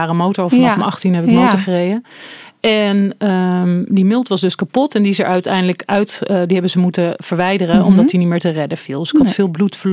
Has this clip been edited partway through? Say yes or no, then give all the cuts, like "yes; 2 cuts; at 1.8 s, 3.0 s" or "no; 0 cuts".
no; 0 cuts